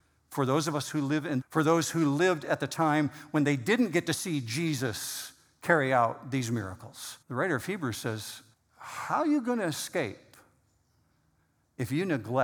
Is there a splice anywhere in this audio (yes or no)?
yes